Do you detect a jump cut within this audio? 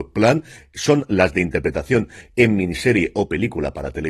no; 0 cuts

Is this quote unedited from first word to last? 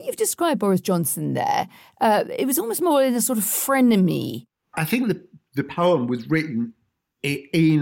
yes; 0 cuts

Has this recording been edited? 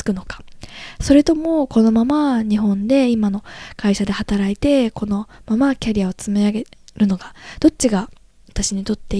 no; 0 cuts

